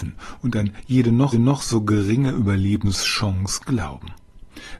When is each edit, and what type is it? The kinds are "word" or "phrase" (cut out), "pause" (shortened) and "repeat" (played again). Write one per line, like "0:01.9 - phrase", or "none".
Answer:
0:01.3 - repeat